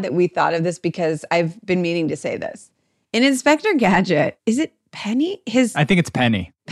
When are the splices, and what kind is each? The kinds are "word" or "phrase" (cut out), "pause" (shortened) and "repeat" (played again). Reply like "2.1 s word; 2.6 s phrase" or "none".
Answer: none